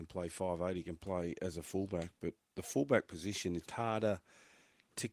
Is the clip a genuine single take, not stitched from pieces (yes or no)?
no